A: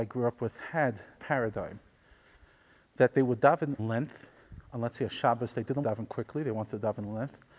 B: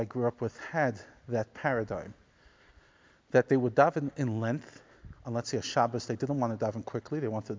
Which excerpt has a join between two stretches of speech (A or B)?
A